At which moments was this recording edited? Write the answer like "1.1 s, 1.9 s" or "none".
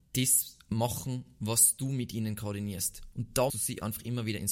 3.5 s